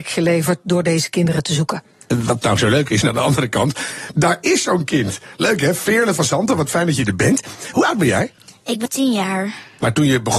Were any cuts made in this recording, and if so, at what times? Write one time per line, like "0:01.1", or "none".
0:03.0
0:08.9